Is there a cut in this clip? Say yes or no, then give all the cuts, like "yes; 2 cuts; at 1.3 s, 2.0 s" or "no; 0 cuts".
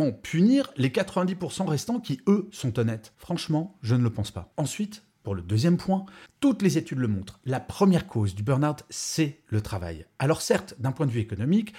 yes; 1 cut; at 6.3 s